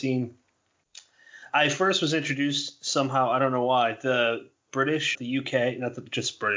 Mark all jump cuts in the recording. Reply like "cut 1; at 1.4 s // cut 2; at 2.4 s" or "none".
cut 1; at 1.5 s // cut 2; at 5.1 s